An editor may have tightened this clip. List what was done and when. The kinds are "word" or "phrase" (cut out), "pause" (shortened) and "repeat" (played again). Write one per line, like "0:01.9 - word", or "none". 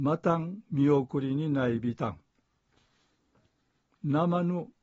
none